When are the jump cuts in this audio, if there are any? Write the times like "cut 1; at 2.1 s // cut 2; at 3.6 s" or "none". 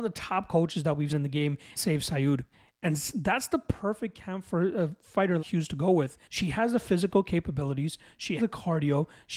cut 1; at 1.1 s // cut 2; at 1.8 s // cut 3; at 2.5 s // cut 4; at 5.4 s // cut 5; at 6.2 s // cut 6; at 8.4 s